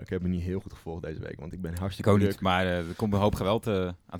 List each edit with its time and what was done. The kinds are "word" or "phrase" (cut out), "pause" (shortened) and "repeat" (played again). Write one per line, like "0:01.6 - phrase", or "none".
none

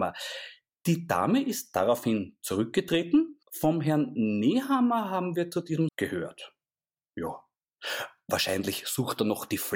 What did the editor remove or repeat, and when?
0:03.4 - pause
0:05.9 - phrase

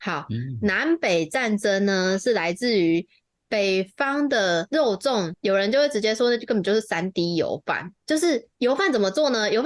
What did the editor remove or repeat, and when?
none

